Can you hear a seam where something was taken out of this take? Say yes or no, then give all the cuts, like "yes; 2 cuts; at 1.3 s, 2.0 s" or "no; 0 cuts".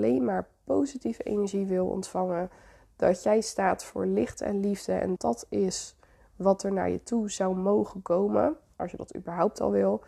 yes; 1 cut; at 5.2 s